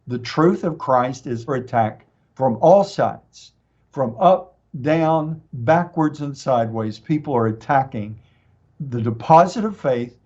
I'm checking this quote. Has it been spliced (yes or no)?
yes